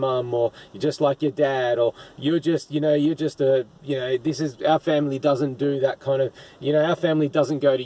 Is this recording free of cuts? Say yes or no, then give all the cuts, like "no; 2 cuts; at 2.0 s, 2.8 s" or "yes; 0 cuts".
yes; 0 cuts